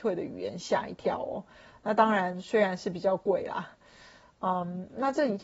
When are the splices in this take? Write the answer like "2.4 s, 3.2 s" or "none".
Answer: none